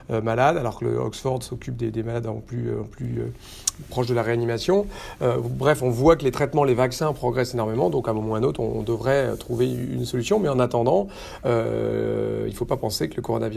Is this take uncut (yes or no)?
yes